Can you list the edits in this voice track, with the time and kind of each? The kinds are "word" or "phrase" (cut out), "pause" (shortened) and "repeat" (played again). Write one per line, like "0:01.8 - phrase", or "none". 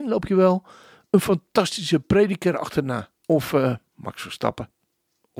0:03.2 - pause
0:03.9 - pause